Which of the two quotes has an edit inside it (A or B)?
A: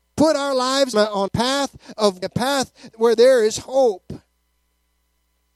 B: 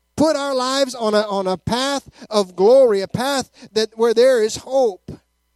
A